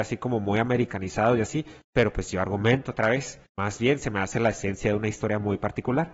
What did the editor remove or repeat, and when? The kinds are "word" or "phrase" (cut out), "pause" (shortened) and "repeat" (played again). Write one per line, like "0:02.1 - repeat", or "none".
0:01.8 - pause
0:03.5 - pause

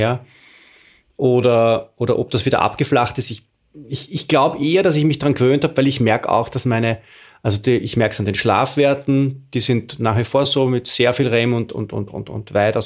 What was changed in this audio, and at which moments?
none

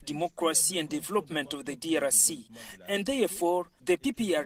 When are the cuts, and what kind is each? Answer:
none

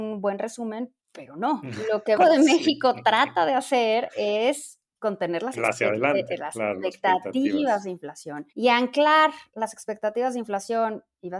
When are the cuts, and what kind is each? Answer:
0:01.0 - pause
0:02.2 - word
0:08.5 - pause

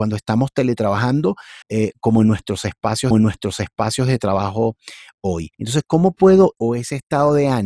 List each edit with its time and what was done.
0:01.6 - pause
0:03.1 - repeat
0:05.5 - pause
0:06.5 - phrase

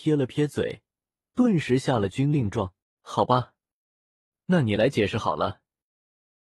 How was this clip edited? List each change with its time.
0:02.8 - pause

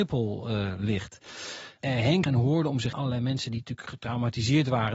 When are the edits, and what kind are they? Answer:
0:02.2 - word
0:02.9 - word

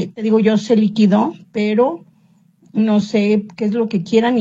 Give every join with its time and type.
none

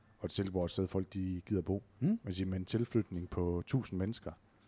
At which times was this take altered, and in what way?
0:01.9 - pause

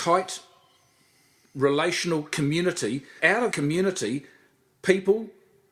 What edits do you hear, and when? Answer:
0:03.2 - word
0:03.5 - word

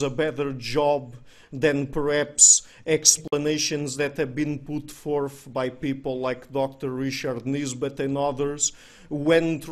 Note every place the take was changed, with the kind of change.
none

